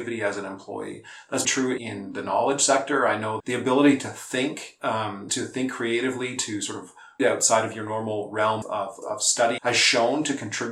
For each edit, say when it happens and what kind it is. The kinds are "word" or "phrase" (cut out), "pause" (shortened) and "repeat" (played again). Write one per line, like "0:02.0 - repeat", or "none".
0:01.4 - word
0:01.8 - word
0:03.4 - word
0:05.3 - word
0:07.2 - word
0:08.6 - word
0:09.0 - word
0:09.6 - word